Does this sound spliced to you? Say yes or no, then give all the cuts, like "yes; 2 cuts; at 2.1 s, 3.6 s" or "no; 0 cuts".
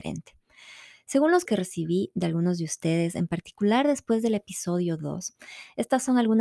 yes; 1 cut; at 1.5 s